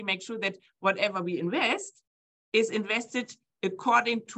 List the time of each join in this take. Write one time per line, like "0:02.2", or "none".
none